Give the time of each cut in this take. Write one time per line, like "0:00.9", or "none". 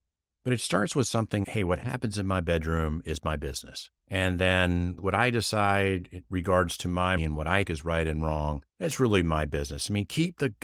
0:01.4
0:04.0
0:07.2
0:07.6
0:08.7